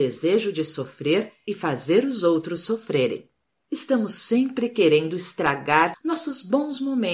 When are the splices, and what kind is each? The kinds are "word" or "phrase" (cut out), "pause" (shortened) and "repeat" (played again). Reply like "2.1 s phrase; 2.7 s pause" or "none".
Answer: none